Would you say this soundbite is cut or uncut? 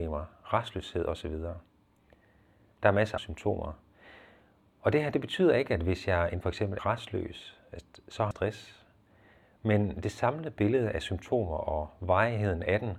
cut